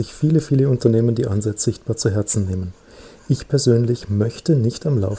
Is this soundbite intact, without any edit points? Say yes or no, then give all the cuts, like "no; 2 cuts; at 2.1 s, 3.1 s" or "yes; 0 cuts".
no; 1 cut; at 1.7 s